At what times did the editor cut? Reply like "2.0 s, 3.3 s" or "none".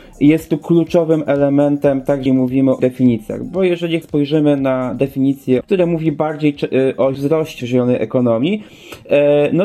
2.3 s, 2.8 s, 4.0 s, 5.6 s, 7.1 s, 7.6 s